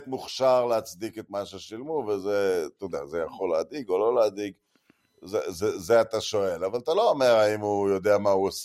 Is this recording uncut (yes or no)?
yes